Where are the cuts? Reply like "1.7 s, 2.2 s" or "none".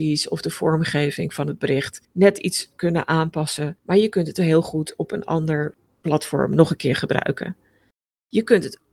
none